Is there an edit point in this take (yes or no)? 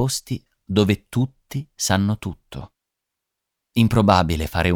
no